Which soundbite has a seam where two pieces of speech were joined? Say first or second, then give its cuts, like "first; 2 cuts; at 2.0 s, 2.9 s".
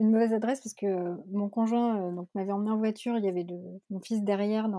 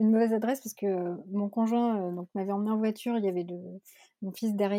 first; 1 cut; at 3.8 s